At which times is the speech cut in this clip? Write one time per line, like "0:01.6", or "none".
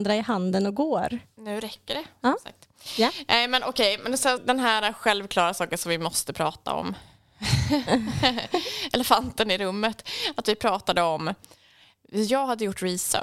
0:04.4

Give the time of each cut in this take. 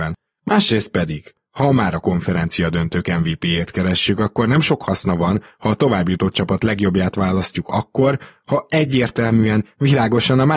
none

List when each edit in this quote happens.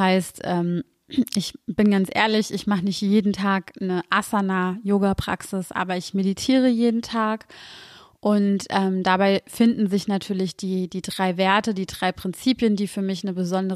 none

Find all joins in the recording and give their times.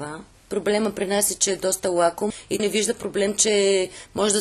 0:02.6

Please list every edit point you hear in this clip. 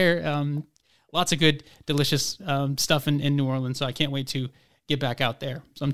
none

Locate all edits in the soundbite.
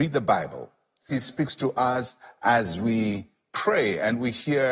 0:01.1

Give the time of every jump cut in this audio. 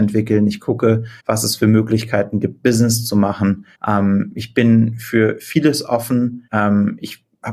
0:01.2
0:03.7
0:06.5

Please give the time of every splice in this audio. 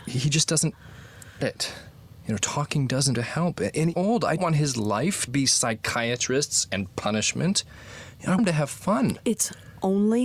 0:01.4
0:03.1
0:03.9
0:04.4
0:05.3
0:08.4

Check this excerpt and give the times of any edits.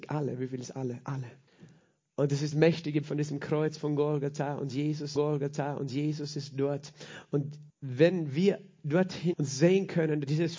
0:01.5
0:02.5
0:03.0
0:05.1
0:07.7
0:09.3

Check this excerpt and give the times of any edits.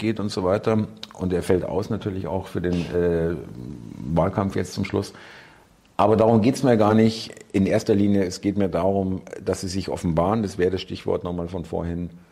none

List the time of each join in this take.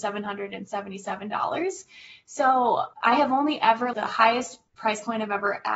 0:02.9
0:03.9
0:04.7

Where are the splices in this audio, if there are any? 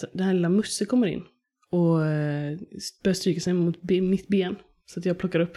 none

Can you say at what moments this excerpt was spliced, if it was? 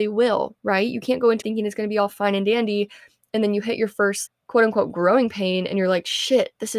0:01.4
0:04.3

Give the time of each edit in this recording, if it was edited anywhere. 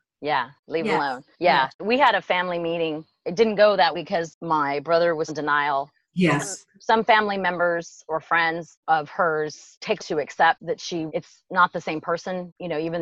0:01.3
0:03.9
0:05.3
0:10.0
0:11.1

